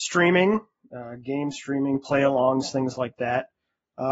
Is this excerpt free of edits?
yes; 0 cuts

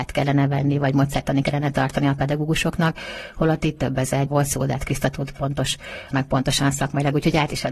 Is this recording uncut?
no; 4 cuts; at 1.4 s, 3.6 s, 4.3 s, 6.1 s

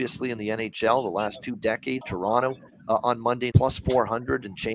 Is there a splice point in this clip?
yes; 2 cuts; at 2.0 s, 3.5 s

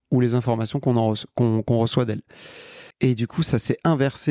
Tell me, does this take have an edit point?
yes; 1 cut; at 2.9 s

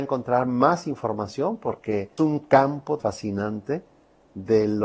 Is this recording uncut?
no; 2 cuts; at 2.2 s, 3.0 s

